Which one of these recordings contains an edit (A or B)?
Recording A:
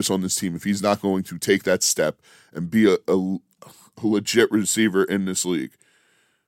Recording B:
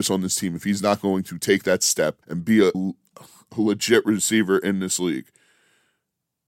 B